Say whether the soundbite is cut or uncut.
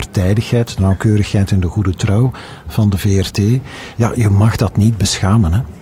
uncut